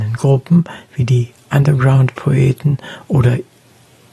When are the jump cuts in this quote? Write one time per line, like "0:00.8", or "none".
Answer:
none